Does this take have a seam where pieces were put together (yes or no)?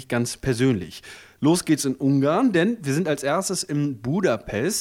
no